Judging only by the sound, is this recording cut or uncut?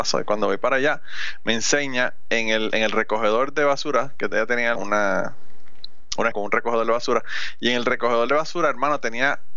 cut